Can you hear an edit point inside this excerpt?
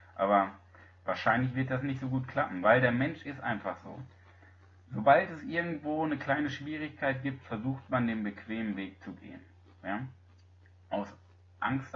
no; 0 cuts

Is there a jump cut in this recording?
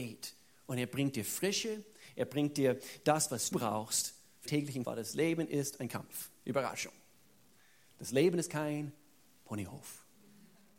yes; 3 cuts; at 3.5 s, 4.5 s, 4.8 s

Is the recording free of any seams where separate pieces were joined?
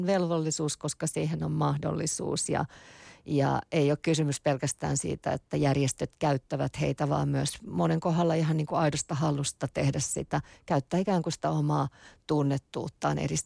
yes; 0 cuts

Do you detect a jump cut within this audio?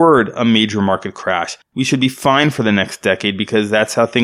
no; 0 cuts

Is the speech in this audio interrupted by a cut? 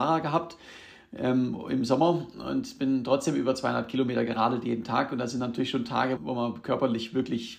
yes; 1 cut; at 6.2 s

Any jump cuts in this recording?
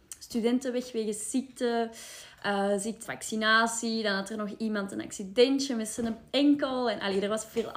yes; 1 cut; at 3.0 s

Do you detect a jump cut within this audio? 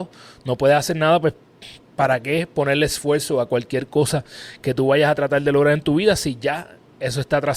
no; 0 cuts

